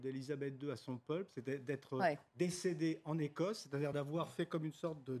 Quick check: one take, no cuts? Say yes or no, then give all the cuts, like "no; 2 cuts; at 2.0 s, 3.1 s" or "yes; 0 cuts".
yes; 0 cuts